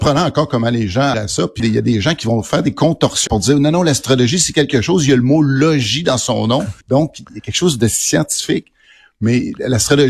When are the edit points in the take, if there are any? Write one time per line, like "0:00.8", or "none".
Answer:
0:01.1
0:01.6
0:03.3
0:06.8